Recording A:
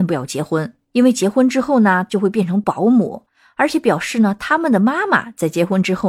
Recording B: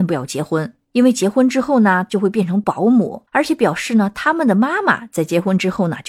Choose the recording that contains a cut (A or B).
B